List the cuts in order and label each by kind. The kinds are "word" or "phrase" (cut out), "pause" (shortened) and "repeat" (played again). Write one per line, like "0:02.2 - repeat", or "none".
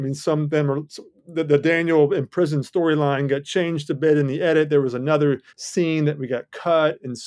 0:05.5 - pause